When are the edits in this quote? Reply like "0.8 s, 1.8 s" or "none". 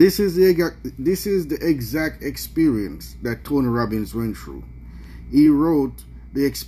none